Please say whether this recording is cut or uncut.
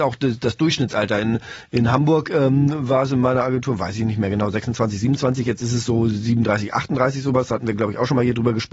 uncut